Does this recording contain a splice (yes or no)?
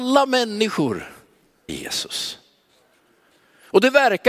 yes